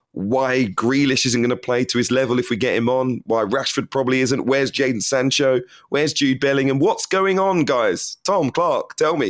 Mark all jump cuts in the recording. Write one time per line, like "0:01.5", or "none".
none